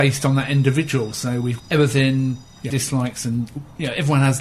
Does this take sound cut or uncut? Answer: cut